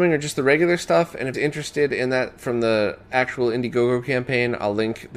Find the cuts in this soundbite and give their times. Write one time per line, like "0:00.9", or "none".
0:01.3